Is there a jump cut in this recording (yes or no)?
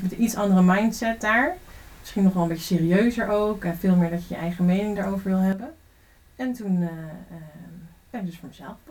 no